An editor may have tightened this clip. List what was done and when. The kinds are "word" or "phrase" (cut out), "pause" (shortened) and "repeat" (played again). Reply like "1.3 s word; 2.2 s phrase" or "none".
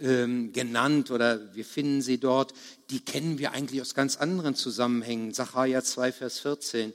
none